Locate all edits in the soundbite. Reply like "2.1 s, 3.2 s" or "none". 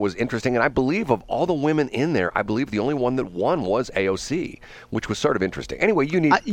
none